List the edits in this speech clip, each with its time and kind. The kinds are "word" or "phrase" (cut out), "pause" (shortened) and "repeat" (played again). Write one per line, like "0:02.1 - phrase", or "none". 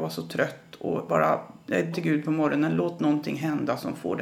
0:01.1 - word
0:01.9 - word